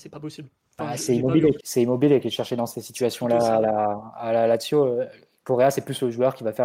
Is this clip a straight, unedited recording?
no; 1 cut; at 1.6 s

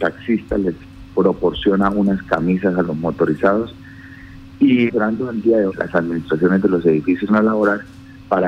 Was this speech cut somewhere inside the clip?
yes; 3 cuts; at 4.9 s, 5.7 s, 7.3 s

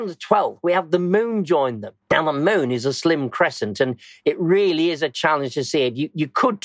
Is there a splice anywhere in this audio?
yes; 1 cut; at 2.0 s

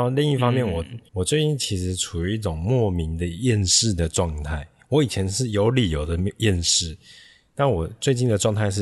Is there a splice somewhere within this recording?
yes; 1 cut; at 1.1 s

